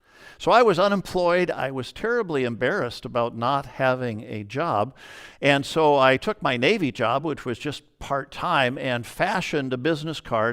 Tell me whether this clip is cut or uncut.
uncut